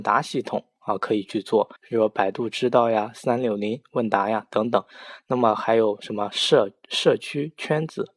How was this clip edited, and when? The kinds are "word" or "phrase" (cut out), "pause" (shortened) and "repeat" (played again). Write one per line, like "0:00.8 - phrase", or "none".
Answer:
0:01.8 - pause